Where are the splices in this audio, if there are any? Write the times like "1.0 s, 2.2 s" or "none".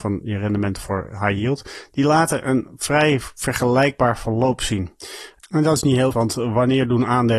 6.1 s